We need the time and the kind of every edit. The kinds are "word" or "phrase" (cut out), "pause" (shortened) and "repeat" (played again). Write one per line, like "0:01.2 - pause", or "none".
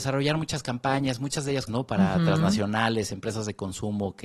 0:01.7 - word